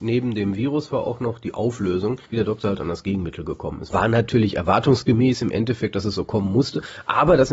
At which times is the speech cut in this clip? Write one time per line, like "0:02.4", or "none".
0:02.3